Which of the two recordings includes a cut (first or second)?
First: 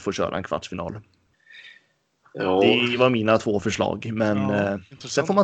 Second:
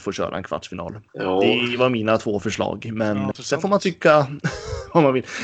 second